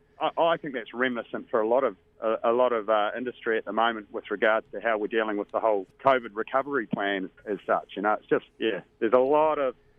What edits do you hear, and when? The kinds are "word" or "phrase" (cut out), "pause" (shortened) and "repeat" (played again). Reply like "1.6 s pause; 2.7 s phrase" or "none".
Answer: 5.9 s pause; 8.5 s pause